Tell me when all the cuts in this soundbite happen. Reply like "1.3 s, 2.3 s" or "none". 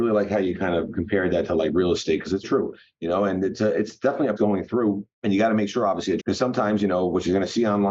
2.4 s, 4.4 s, 5.1 s, 6.2 s